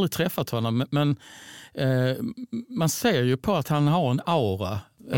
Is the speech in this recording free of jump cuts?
yes; 0 cuts

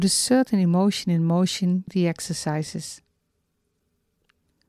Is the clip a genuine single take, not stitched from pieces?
no; 1 cut; at 1.9 s

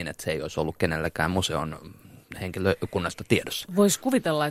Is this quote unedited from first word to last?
yes; 0 cuts

